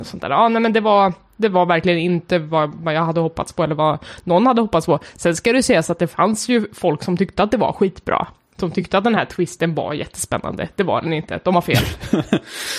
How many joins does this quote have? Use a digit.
0